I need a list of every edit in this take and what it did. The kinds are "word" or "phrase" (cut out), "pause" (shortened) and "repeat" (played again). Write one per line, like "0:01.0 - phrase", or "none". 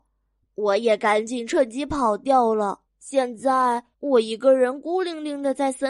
0:02.9 - pause
0:03.9 - pause